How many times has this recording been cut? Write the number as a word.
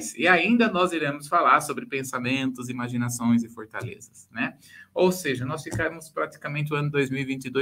zero